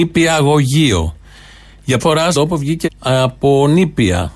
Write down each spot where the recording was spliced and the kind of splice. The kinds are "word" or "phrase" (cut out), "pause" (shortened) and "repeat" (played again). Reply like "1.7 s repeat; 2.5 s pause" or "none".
2.0 s word; 2.3 s phrase; 2.8 s word